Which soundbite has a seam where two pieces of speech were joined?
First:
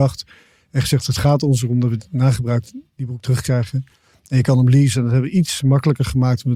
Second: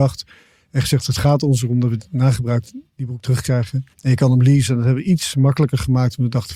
second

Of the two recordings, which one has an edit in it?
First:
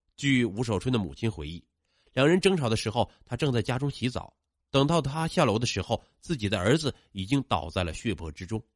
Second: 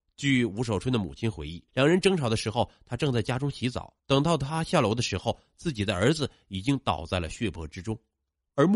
second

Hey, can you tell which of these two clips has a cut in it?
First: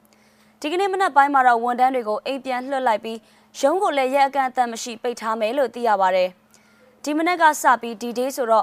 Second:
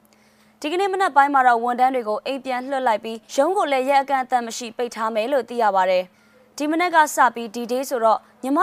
second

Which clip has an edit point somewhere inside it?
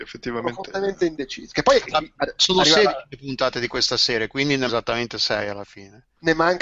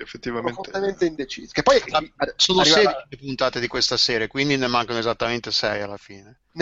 first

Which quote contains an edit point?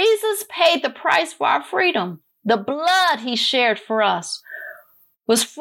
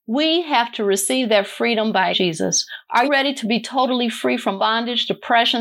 second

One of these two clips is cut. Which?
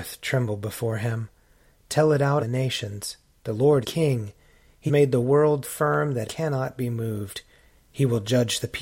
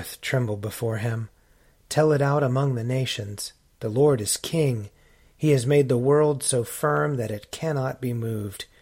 first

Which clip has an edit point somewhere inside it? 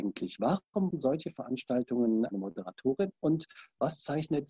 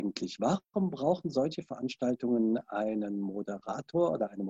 first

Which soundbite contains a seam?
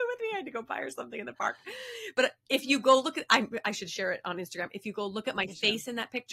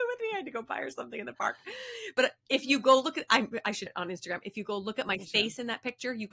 second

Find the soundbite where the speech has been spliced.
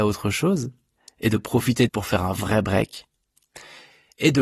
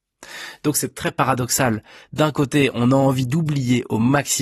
first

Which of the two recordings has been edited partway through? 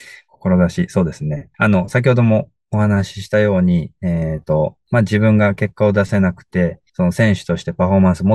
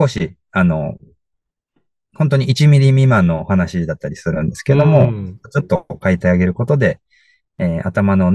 first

